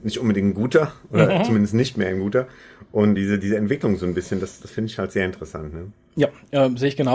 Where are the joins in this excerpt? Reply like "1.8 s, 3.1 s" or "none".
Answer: 3.2 s